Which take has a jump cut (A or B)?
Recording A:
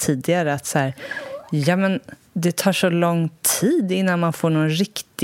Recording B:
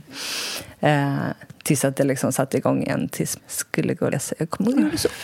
B